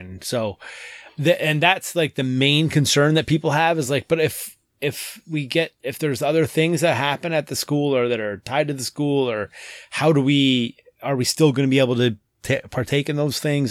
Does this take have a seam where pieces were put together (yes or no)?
no